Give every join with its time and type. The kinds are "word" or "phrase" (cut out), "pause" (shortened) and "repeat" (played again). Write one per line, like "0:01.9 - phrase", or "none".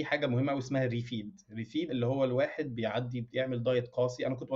0:01.9 - word